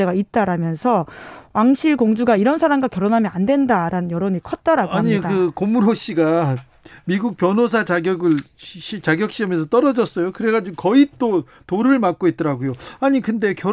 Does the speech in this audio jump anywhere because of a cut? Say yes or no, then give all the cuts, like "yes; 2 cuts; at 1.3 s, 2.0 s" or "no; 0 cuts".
no; 0 cuts